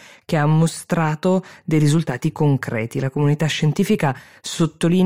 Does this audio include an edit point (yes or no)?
no